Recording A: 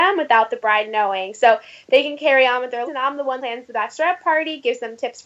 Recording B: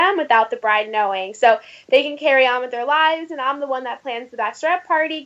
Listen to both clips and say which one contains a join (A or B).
A